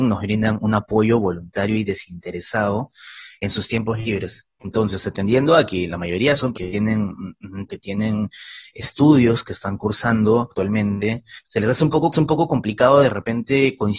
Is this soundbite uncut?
no; 4 cuts; at 6.5 s, 7.7 s, 11.4 s, 12.1 s

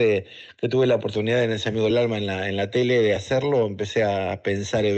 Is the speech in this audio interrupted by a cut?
no; 0 cuts

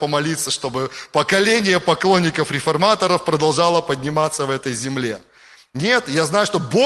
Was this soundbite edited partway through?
no; 0 cuts

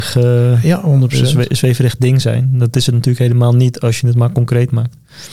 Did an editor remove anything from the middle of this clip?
no; 0 cuts

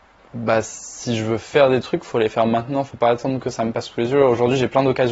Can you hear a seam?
no; 0 cuts

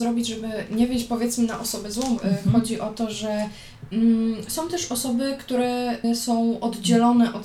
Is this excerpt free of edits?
yes; 0 cuts

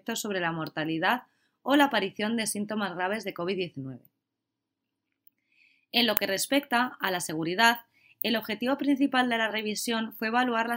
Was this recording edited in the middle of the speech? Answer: no; 0 cuts

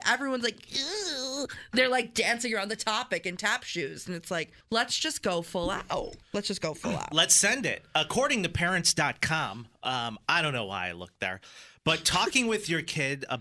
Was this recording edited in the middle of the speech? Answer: yes; 2 cuts; at 4.6 s, 6.2 s

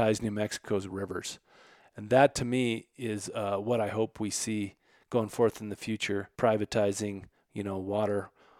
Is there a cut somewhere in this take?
yes; 1 cut; at 6.3 s

